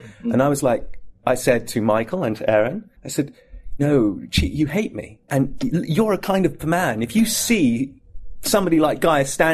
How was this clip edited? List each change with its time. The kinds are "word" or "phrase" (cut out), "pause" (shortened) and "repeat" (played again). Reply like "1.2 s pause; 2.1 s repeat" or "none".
2.9 s pause; 3.8 s word; 6.6 s phrase